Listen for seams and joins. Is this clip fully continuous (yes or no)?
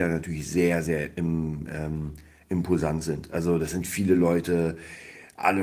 yes